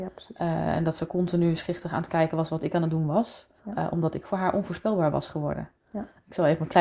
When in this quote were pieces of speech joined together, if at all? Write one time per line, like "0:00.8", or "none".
0:03.6